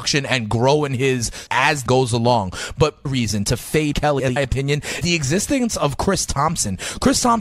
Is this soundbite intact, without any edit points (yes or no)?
no